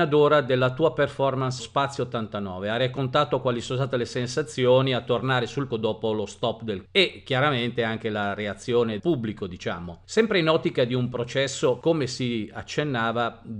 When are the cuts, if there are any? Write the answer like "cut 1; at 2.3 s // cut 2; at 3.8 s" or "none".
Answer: cut 1; at 1.6 s // cut 2; at 5.7 s // cut 3; at 6.9 s // cut 4; at 9.0 s